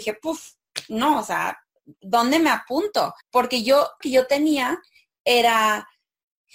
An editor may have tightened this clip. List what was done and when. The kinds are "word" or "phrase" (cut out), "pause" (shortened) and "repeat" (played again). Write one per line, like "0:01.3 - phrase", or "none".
0:03.2 - pause
0:04.0 - phrase